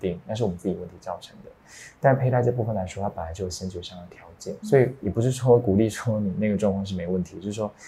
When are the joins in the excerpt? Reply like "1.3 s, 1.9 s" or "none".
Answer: 4.6 s